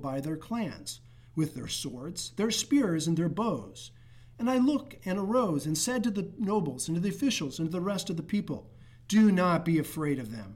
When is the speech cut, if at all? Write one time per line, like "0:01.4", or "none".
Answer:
none